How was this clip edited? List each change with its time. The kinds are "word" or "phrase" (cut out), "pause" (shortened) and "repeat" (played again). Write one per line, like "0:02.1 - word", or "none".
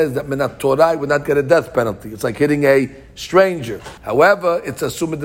0:04.0 - pause